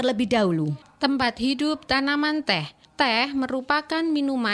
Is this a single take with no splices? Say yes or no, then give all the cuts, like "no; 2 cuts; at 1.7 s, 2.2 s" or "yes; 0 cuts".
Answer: yes; 0 cuts